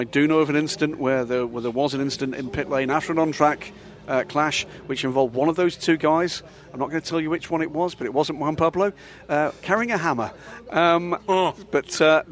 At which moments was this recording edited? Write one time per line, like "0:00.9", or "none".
none